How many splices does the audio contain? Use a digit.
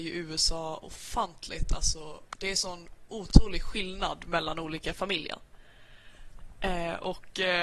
0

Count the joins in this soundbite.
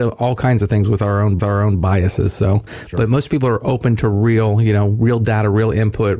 1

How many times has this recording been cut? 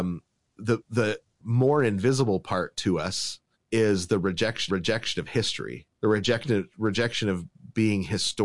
3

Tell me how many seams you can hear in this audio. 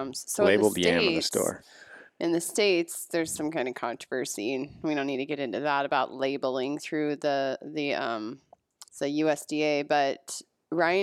2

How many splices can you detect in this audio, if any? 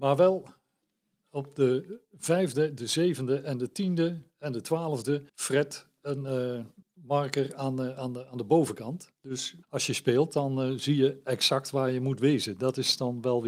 4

